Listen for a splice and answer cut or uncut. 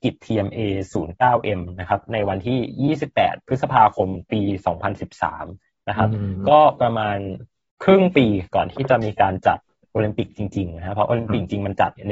uncut